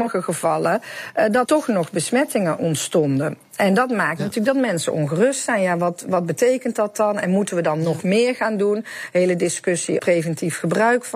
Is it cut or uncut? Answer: cut